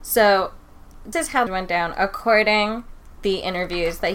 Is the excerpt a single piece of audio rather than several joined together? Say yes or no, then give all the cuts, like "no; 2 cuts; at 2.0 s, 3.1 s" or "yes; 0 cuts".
no; 3 cuts; at 1.1 s, 1.5 s, 3.2 s